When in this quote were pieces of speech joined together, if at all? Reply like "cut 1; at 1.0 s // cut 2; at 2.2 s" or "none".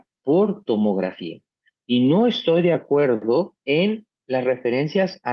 cut 1; at 1.5 s // cut 2; at 3.6 s